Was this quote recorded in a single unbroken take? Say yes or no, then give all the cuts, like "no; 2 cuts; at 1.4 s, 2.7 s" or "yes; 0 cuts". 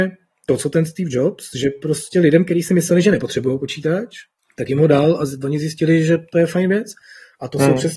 yes; 0 cuts